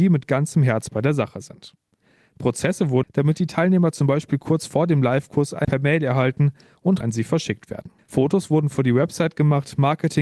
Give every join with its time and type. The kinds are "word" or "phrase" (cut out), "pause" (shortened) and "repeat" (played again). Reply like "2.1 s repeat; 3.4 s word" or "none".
3.0 s word; 5.6 s word; 7.0 s word; 8.0 s pause